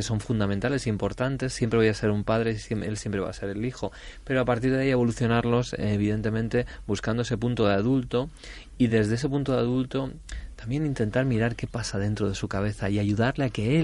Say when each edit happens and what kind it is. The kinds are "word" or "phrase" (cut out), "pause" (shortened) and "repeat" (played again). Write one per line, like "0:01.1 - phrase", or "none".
none